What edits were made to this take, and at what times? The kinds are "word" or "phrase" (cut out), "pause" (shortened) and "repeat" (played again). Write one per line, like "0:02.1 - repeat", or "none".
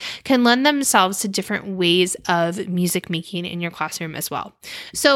none